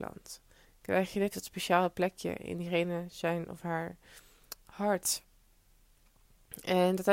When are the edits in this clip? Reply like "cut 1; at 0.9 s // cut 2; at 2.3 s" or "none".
cut 1; at 1.3 s // cut 2; at 4.6 s